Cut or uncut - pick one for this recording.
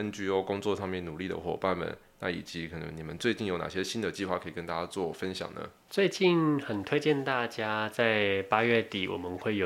uncut